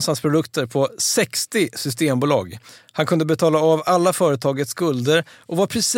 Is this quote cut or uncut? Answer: uncut